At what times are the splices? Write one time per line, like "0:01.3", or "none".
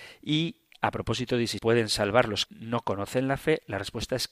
0:01.6
0:02.5

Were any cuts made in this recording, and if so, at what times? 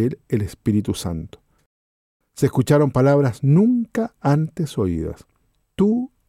none

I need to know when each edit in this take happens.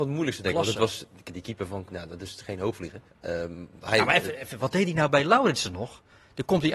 0:01.9
0:03.1

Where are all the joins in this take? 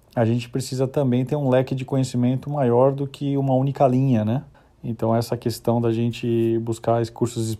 0:04.5

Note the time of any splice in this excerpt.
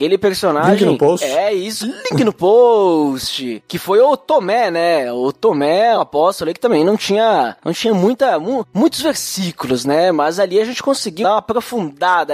0:01.8
0:06.0
0:11.2

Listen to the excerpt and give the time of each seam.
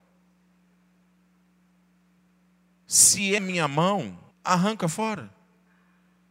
0:03.4
0:04.3

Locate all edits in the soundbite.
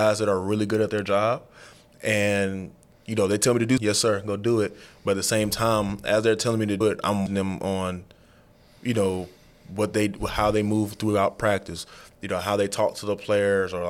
0:03.8
0:06.8
0:07.3

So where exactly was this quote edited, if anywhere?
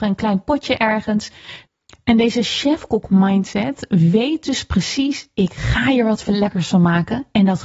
none

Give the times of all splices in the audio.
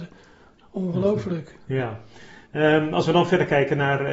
0:02.4

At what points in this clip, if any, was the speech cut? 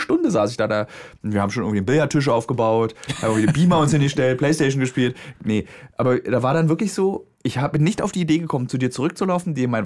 0:07.3

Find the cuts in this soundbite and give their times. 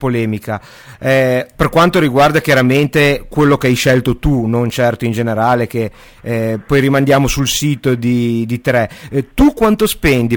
none

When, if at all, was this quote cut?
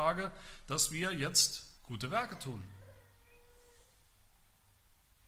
0:01.8

